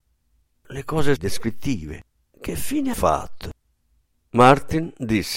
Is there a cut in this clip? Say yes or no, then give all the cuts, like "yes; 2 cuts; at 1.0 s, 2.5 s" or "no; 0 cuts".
yes; 2 cuts; at 1.2 s, 2.9 s